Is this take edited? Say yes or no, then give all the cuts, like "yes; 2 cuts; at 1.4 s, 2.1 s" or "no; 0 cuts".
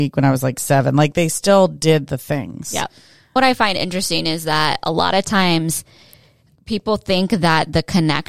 no; 0 cuts